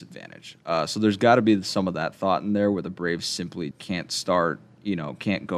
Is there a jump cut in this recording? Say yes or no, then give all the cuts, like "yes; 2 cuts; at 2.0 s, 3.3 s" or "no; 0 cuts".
yes; 1 cut; at 3.7 s